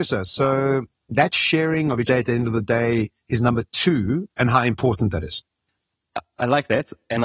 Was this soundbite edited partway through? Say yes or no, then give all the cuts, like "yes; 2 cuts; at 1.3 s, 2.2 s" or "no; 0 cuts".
yes; 2 cuts; at 2.1 s, 3.2 s